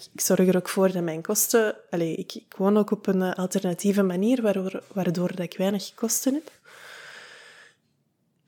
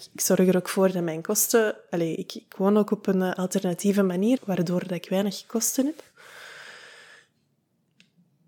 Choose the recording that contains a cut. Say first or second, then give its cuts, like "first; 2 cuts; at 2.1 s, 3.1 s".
second; 1 cut; at 4.4 s